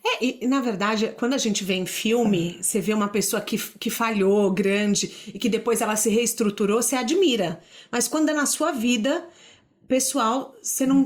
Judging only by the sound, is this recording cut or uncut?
uncut